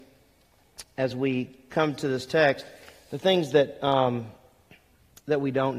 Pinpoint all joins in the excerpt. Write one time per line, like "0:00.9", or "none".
none